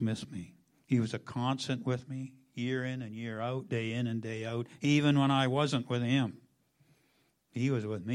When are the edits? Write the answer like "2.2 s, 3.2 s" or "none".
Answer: none